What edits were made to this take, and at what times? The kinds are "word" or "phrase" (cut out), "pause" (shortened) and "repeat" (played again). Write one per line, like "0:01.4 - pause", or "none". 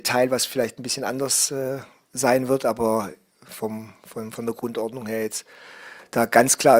none

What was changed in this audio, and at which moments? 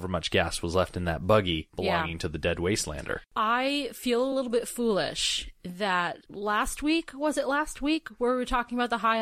none

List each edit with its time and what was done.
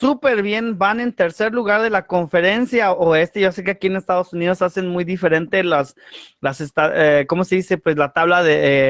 none

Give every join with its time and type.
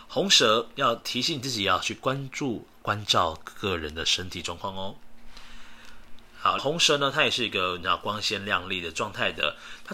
0:06.6 - phrase

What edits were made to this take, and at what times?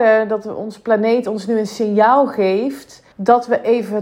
0:03.1 - pause

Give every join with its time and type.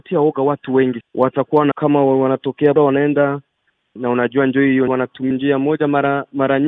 0:01.0 - word
0:01.7 - word
0:02.8 - word
0:04.0 - word
0:04.9 - word
0:05.3 - word

